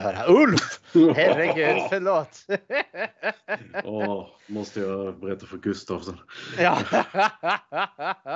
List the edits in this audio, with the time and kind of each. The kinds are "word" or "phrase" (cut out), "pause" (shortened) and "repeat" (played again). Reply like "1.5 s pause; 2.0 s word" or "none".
none